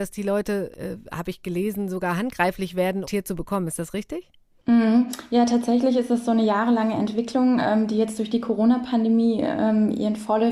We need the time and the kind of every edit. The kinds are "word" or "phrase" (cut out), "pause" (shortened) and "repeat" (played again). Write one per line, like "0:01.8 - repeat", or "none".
0:03.1 - phrase